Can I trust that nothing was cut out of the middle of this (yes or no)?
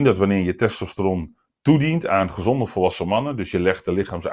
yes